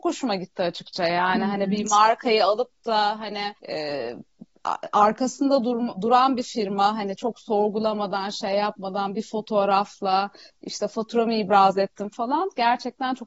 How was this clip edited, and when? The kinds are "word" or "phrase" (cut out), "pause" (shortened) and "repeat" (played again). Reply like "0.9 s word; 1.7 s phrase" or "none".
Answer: 3.6 s pause